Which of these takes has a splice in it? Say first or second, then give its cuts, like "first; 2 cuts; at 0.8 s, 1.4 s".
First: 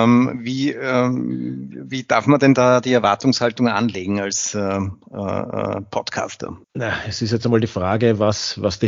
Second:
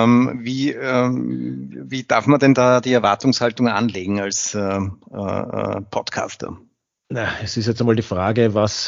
first; 1 cut; at 6.6 s